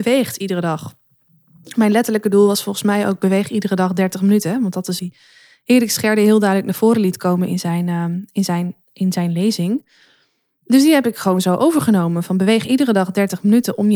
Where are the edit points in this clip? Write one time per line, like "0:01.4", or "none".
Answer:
0:05.0
0:08.8